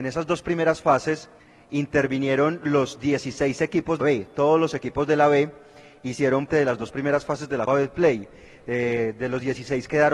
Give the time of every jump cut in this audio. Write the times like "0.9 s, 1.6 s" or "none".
1.4 s, 4.0 s, 6.5 s, 7.7 s